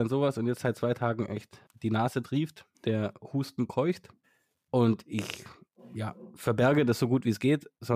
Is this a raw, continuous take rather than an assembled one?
no; 3 cuts; at 1.7 s, 2.7 s, 4.2 s

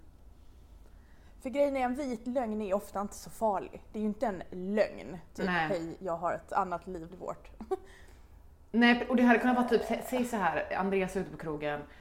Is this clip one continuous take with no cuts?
no; 1 cut; at 7.1 s

